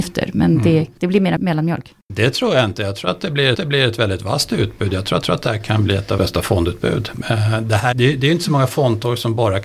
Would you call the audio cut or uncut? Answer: cut